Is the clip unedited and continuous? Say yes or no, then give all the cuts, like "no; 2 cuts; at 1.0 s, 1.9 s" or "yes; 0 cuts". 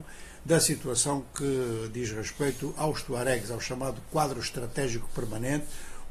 yes; 0 cuts